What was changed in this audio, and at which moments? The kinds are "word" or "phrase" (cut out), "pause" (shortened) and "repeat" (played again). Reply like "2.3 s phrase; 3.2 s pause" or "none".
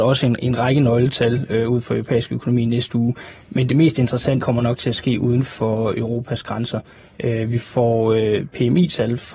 4.4 s word